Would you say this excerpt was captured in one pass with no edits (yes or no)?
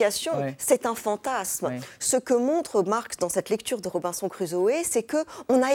yes